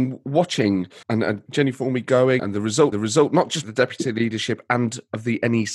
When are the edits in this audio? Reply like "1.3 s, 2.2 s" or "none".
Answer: 1.0 s, 1.5 s, 2.4 s, 2.9 s, 3.6 s